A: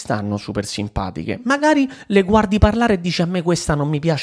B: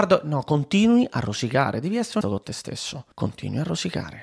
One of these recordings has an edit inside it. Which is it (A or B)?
B